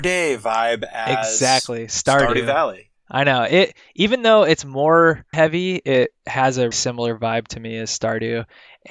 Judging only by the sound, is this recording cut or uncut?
cut